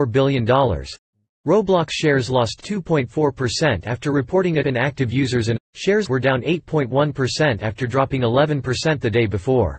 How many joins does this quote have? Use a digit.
3